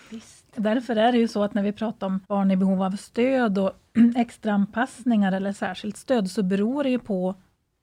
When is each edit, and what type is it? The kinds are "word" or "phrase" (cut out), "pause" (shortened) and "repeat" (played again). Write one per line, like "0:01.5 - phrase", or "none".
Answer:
0:02.2 - pause